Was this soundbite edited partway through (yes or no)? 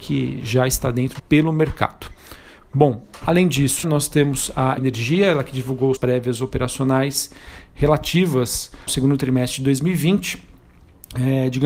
yes